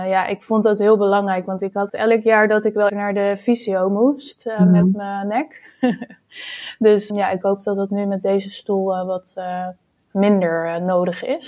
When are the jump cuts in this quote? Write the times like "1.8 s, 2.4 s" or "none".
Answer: 1.9 s, 2.9 s, 7.1 s